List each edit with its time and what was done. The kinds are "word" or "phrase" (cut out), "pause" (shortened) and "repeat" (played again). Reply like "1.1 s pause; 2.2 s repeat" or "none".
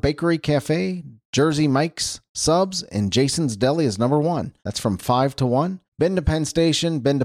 4.6 s pause; 5.9 s pause

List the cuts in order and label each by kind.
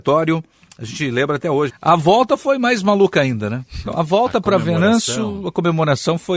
1.7 s word; 3.9 s word

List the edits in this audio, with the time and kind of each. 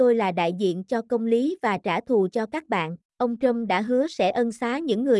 3.1 s pause

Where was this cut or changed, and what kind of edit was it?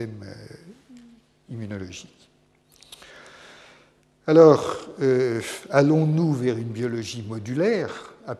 none

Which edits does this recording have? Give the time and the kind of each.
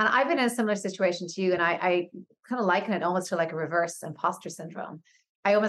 none

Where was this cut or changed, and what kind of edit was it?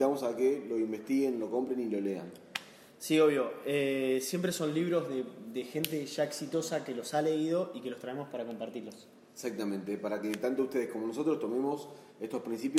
none

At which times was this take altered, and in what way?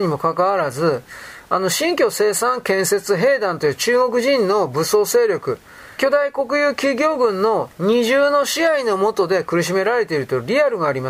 6.0 s word

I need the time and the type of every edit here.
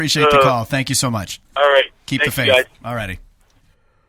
1.4 s pause

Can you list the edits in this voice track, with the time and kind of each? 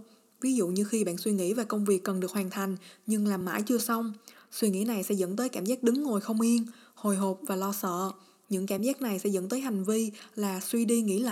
none

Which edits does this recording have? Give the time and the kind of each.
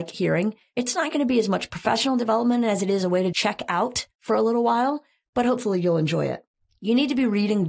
3.3 s word

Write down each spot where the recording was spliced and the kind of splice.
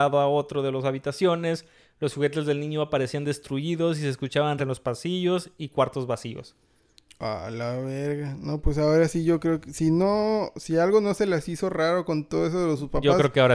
4.6 s word

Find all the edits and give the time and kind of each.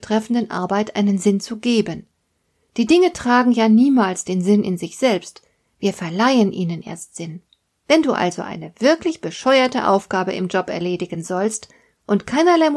none

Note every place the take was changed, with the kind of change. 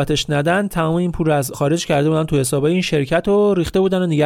1.5 s word

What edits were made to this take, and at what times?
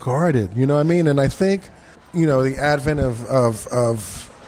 1.9 s pause

